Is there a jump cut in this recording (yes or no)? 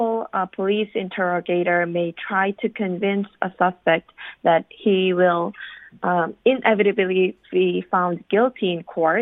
no